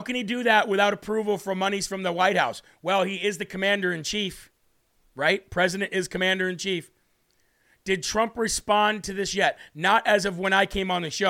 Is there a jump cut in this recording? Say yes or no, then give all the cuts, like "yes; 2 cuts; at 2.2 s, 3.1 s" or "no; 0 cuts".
no; 0 cuts